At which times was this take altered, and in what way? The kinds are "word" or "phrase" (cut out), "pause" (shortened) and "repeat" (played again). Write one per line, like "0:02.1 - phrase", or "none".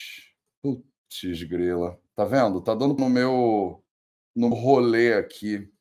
0:03.0 - word
0:04.5 - word